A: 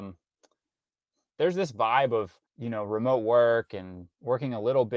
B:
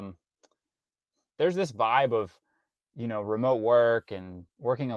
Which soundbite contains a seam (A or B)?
A